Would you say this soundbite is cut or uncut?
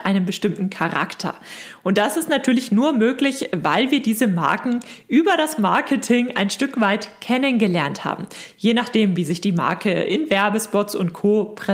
uncut